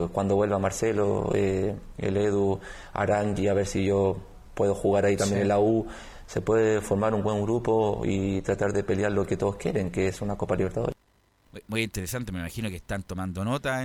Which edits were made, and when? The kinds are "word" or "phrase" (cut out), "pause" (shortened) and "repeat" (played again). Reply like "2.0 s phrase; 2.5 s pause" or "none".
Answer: none